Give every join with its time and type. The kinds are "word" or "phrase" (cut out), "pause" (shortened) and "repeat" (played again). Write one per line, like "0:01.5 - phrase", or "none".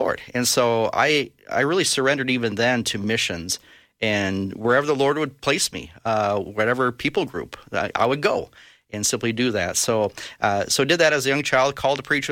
none